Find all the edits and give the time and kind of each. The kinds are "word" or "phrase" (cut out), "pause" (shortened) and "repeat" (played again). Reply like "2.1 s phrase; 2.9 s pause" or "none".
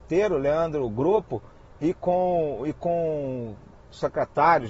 none